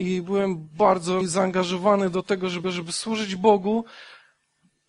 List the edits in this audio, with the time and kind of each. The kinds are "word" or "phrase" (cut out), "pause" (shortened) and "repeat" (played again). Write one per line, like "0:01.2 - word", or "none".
0:01.2 - word
0:02.6 - repeat